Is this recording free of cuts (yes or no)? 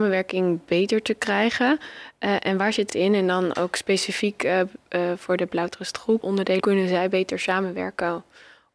no